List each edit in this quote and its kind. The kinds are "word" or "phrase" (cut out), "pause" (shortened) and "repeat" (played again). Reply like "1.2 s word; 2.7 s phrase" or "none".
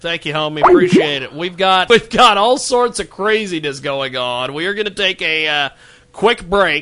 1.9 s word